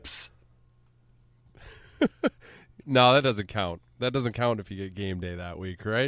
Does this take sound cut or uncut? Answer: uncut